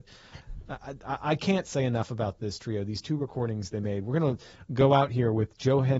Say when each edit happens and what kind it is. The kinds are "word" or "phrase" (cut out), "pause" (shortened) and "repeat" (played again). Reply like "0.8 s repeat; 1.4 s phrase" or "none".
none

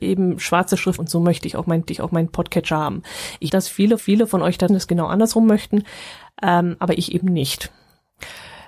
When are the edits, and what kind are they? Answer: 1.0 s phrase; 1.9 s repeat; 3.5 s word; 4.0 s repeat; 4.7 s word

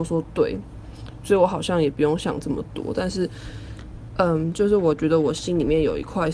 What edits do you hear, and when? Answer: none

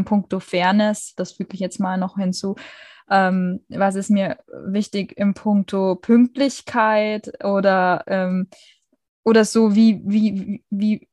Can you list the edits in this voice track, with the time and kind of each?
none

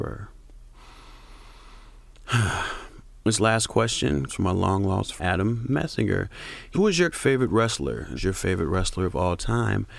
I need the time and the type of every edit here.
3.2 s phrase; 4.3 s word; 5.2 s word; 6.7 s word; 7.1 s word; 8.2 s word

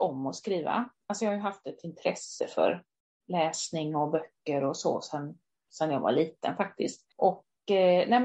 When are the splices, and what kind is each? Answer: none

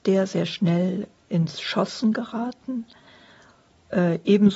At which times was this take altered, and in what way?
none

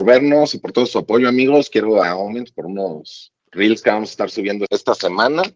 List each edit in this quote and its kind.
2.0 s word; 3.4 s pause; 4.7 s word

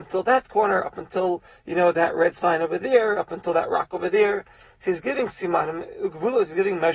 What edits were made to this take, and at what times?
none

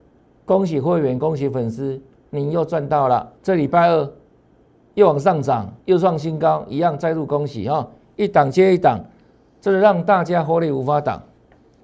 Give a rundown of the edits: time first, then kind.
3.4 s pause; 5.8 s pause

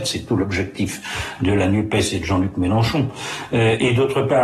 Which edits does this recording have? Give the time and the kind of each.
none

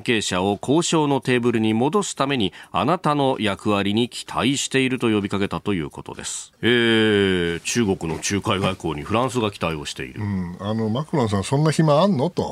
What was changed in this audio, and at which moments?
6.6 s pause

